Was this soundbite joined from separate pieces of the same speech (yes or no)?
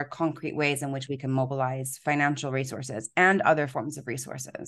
no